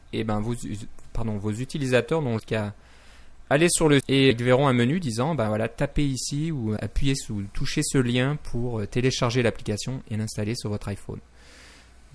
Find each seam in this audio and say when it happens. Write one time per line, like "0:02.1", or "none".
0:02.4
0:04.0
0:04.3
0:06.8